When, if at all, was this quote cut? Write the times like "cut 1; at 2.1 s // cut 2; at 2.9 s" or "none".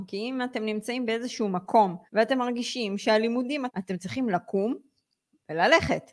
cut 1; at 2.1 s // cut 2; at 3.7 s